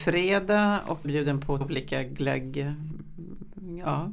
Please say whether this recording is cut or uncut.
cut